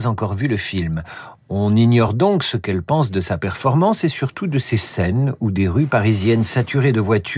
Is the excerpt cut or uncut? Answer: uncut